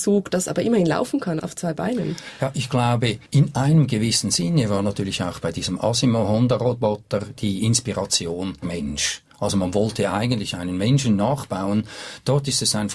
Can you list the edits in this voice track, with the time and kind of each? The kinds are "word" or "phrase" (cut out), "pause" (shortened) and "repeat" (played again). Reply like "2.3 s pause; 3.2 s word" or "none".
3.3 s pause; 8.6 s word